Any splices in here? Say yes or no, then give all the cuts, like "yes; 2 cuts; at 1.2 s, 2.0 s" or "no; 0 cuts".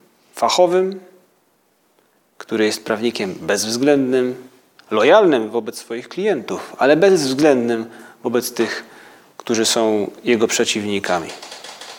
no; 0 cuts